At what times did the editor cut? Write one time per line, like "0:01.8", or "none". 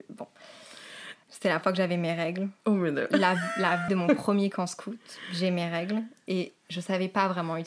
0:01.2
0:01.6
0:03.9